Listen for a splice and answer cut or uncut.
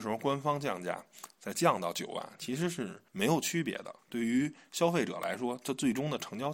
cut